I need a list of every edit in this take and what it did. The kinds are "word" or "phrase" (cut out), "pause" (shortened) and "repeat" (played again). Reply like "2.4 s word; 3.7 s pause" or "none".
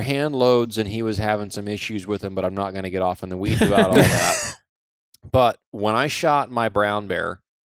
none